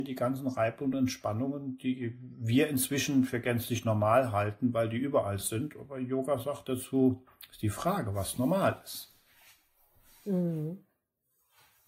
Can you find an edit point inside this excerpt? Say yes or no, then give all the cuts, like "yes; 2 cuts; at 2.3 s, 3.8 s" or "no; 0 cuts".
no; 0 cuts